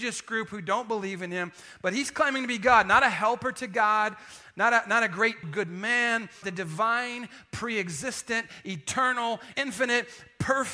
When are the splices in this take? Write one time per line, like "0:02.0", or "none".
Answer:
0:05.4
0:06.4
0:09.5